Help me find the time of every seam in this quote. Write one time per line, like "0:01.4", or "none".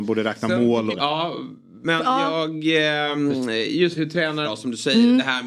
0:00.9
0:04.0
0:04.4